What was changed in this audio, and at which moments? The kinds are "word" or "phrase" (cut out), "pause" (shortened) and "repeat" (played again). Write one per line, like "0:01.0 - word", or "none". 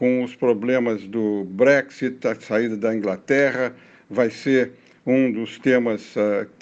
none